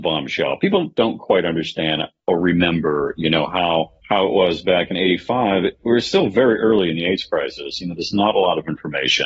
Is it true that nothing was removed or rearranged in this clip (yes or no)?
no